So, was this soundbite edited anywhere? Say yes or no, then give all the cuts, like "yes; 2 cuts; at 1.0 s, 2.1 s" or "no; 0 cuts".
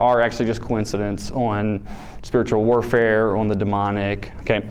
no; 0 cuts